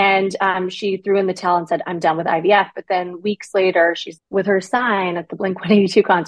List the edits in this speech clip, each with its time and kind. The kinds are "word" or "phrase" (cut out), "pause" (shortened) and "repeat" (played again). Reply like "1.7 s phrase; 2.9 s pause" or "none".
4.2 s word

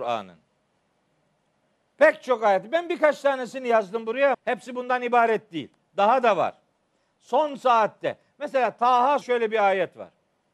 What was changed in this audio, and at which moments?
4.3 s word; 9.2 s word

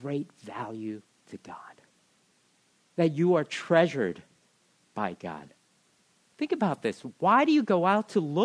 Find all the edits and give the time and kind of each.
none

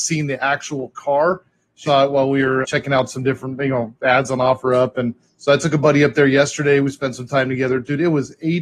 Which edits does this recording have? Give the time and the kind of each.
1.9 s word; 2.6 s word; 5.3 s pause

